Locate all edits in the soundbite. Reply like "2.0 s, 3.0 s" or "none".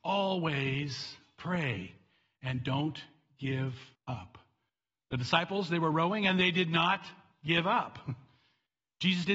3.9 s